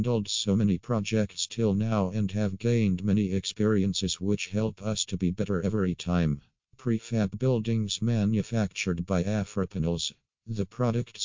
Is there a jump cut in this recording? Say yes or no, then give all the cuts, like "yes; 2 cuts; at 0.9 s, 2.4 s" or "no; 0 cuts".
no; 0 cuts